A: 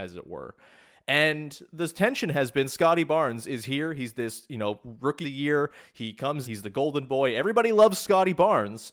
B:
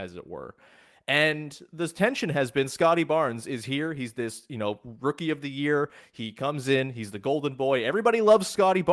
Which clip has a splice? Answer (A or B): A